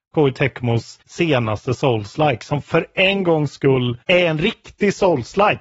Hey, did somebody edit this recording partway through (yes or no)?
yes